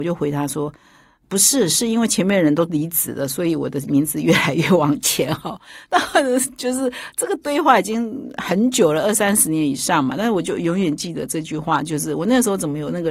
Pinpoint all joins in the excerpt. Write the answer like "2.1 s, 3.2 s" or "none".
none